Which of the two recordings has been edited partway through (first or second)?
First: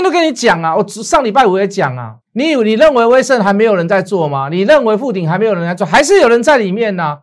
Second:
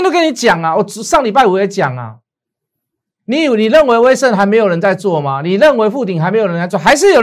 first